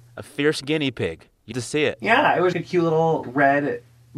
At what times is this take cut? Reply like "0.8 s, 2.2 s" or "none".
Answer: 1.5 s, 2.5 s, 3.2 s